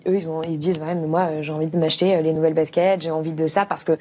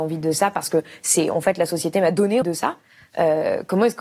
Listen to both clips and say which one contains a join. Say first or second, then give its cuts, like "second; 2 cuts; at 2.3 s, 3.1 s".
second; 1 cut; at 2.4 s